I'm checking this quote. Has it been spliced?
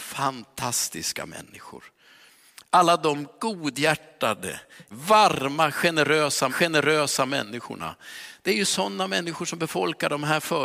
yes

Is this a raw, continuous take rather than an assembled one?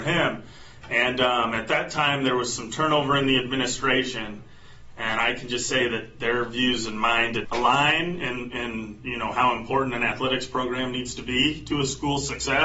no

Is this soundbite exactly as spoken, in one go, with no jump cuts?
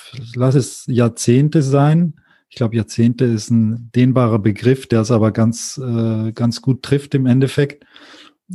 yes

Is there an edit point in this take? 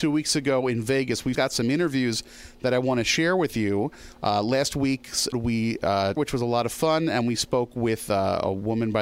yes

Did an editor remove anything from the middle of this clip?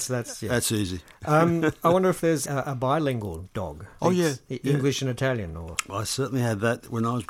yes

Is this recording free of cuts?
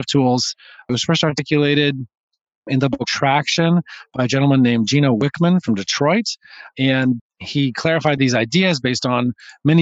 yes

